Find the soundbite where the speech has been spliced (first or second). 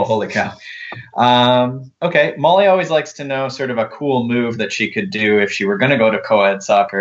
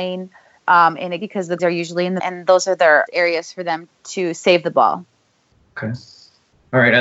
second